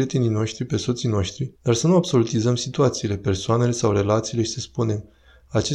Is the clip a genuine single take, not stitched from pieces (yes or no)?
no